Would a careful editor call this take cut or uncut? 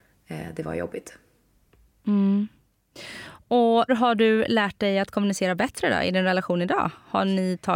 cut